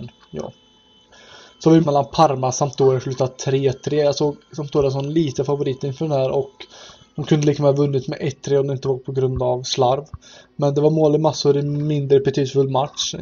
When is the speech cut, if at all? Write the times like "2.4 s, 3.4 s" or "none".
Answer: 1.8 s